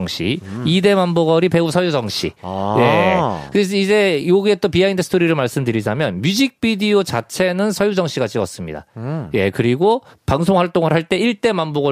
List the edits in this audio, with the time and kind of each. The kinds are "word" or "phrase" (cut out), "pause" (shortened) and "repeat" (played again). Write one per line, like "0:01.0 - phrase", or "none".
0:10.1 - pause